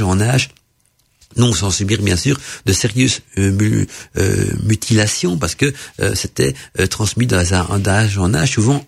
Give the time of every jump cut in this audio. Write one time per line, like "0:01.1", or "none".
none